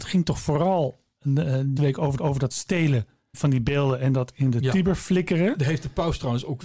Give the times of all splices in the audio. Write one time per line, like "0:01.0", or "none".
0:01.8
0:02.2
0:03.3